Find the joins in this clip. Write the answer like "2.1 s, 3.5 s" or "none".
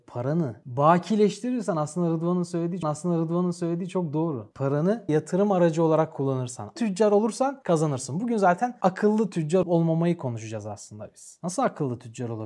2.8 s, 5.1 s, 6.8 s, 9.6 s